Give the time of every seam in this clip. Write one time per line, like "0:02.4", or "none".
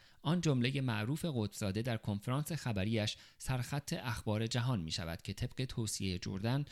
none